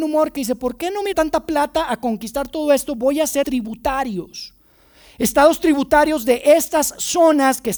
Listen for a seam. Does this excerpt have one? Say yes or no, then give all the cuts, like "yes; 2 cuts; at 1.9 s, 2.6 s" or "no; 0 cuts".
yes; 2 cuts; at 1.1 s, 3.4 s